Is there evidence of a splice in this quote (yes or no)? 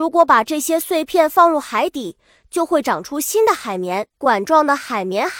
yes